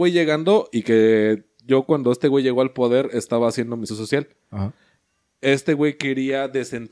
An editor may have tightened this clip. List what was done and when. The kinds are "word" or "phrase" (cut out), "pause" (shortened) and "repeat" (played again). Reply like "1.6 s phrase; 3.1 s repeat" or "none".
3.9 s word